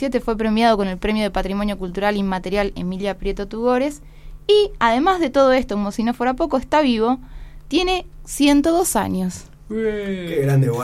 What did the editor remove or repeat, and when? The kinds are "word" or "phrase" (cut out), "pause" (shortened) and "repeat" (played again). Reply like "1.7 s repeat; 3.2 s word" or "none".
none